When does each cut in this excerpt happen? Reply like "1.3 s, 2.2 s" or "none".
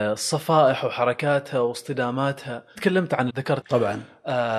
2.8 s, 3.3 s, 3.6 s